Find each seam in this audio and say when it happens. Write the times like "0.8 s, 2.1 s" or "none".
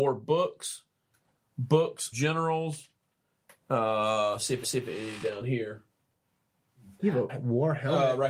2.1 s, 4.6 s, 7.3 s